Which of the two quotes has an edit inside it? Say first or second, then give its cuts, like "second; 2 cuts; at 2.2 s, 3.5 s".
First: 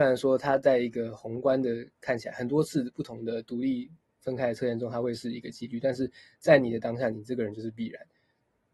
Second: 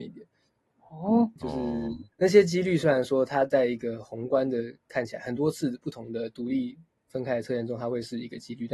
second; 2 cuts; at 1.4 s, 2.1 s